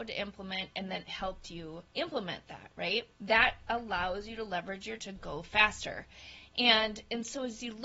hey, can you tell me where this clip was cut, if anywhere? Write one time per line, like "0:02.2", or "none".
0:01.1
0:01.9
0:03.1
0:05.0